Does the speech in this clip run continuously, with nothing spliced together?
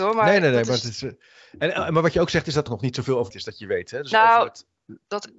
no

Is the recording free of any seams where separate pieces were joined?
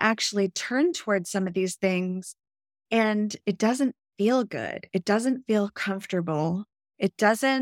yes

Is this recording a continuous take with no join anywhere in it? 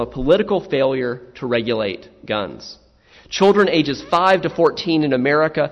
yes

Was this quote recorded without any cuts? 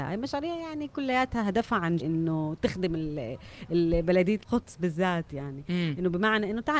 no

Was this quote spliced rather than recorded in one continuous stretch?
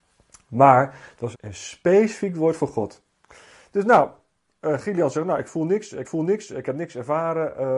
yes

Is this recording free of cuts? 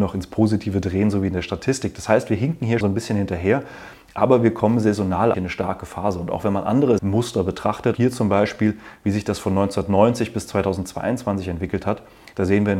no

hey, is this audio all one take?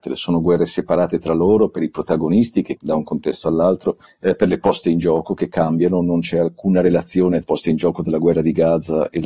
no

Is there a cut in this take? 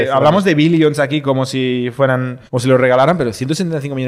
yes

